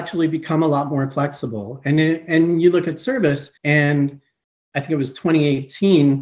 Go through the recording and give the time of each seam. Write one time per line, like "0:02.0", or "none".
0:03.6